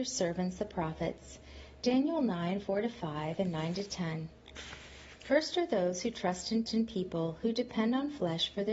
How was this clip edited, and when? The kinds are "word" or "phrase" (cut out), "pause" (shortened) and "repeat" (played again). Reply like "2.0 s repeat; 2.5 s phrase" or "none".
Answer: 6.7 s repeat

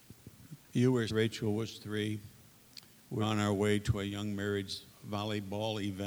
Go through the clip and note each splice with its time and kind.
1.1 s word; 3.2 s word

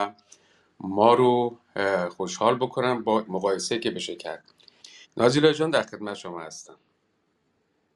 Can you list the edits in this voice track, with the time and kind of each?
3.3 s word; 5.0 s pause

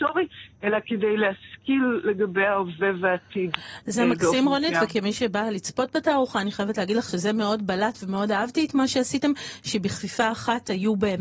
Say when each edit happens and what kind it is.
none

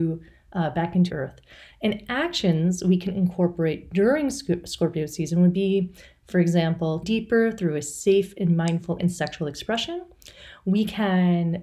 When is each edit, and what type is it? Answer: 1.1 s word; 7.0 s word; 9.0 s word

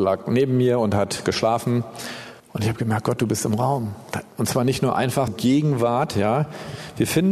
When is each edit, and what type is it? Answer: 2.4 s pause; 5.3 s word

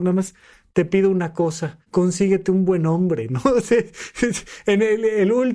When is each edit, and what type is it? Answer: 1.9 s pause

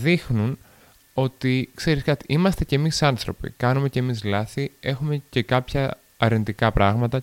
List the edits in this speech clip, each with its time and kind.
none

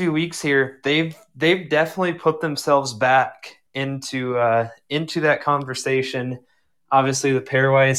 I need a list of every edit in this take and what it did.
3.7 s pause

